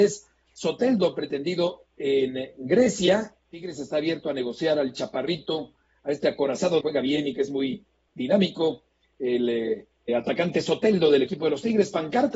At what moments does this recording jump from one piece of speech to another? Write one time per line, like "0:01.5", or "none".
0:03.4
0:06.8
0:10.1